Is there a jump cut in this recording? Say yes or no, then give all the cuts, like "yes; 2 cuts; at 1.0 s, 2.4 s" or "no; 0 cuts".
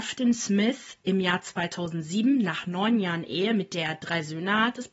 no; 0 cuts